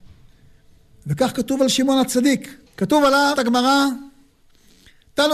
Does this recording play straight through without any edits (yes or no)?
no